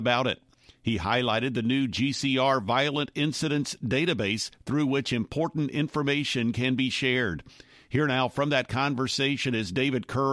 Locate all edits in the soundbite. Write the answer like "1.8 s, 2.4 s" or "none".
none